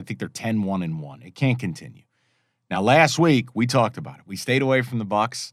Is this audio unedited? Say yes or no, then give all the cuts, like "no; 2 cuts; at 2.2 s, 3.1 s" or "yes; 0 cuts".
yes; 0 cuts